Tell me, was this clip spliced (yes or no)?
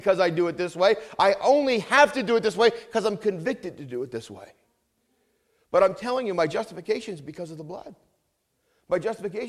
no